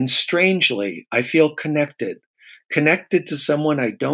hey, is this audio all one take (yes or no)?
yes